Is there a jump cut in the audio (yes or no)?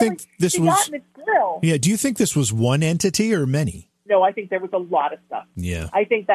yes